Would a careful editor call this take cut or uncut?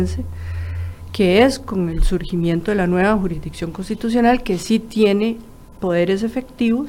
uncut